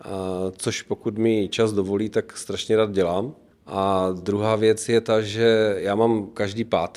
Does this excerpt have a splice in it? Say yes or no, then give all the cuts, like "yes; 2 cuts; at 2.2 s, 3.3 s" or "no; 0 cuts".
yes; 1 cut; at 3.5 s